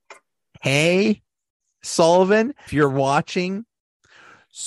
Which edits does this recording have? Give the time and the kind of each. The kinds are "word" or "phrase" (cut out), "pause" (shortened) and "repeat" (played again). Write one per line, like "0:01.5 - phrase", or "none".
0:02.7 - word